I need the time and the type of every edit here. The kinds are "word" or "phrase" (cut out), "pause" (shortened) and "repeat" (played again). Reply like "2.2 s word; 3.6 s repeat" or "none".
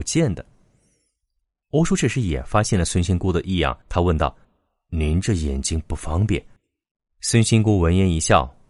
3.8 s pause; 4.4 s pause; 6.6 s pause